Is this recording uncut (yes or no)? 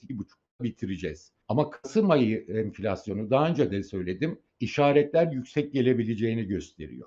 no